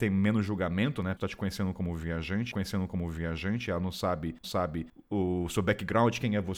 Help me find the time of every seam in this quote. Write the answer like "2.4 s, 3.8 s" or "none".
1.2 s, 2.5 s, 4.4 s